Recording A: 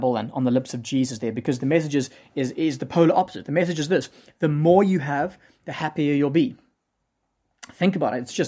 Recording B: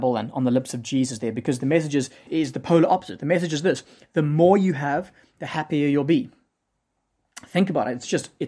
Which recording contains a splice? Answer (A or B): B